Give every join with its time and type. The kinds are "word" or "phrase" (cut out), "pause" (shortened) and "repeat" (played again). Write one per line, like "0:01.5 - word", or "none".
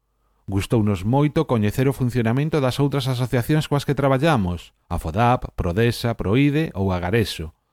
0:04.8 - pause